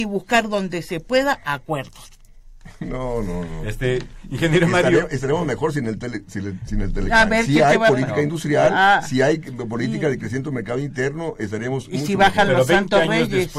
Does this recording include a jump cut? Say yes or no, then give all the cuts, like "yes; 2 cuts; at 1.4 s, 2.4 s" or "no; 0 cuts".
no; 0 cuts